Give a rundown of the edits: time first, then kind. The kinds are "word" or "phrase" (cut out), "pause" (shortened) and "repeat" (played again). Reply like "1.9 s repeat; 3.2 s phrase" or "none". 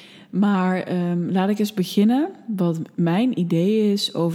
none